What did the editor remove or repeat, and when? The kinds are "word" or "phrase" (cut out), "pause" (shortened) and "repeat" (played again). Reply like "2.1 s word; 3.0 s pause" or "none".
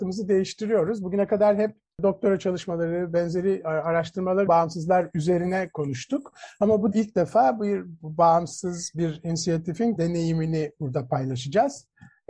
4.5 s word; 6.9 s word; 10.0 s word